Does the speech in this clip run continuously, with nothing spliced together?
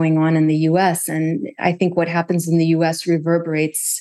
yes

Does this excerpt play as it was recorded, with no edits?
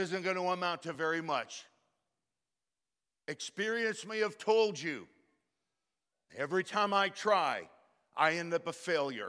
yes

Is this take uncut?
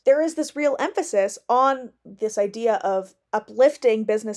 yes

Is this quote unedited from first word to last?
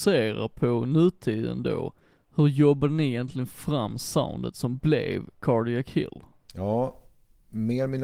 yes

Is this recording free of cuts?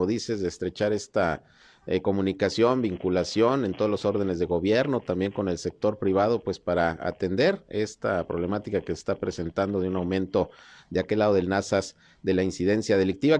yes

